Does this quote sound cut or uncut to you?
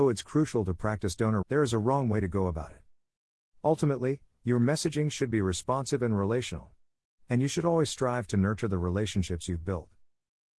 cut